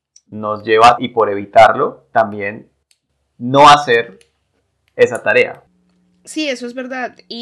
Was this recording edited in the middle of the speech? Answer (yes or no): yes